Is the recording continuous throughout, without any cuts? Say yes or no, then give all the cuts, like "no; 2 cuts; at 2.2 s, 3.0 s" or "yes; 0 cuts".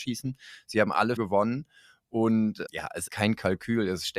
no; 3 cuts; at 1.2 s, 2.7 s, 3.1 s